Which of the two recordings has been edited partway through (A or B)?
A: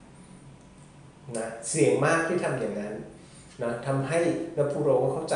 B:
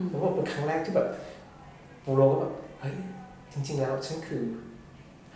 B